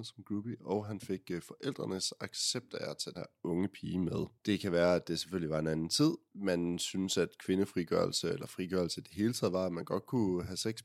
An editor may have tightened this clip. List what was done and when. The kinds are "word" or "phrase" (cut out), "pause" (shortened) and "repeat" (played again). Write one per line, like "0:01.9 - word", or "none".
0:03.1 - word